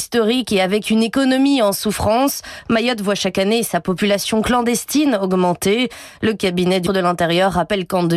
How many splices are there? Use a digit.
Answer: 1